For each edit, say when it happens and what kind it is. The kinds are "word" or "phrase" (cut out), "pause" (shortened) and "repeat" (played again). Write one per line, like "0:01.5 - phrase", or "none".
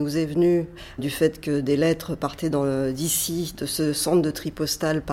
0:01.0 - word